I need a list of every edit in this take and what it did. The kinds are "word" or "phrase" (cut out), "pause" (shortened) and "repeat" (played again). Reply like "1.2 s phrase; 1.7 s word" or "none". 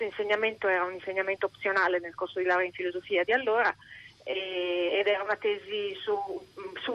none